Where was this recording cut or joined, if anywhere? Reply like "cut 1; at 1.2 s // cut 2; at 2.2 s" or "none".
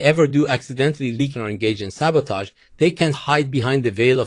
cut 1; at 1.3 s // cut 2; at 3.1 s